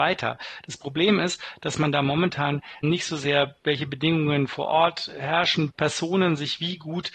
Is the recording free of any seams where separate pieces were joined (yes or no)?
no